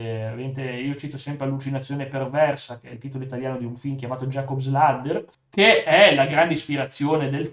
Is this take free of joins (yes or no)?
no